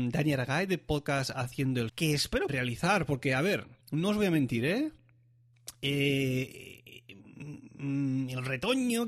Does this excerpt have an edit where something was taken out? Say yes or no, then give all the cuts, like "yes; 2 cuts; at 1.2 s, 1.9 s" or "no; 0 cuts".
yes; 3 cuts; at 1.9 s, 2.5 s, 3.8 s